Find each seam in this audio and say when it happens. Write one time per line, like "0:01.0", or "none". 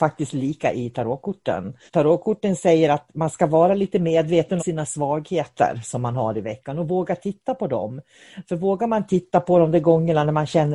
0:01.9
0:04.6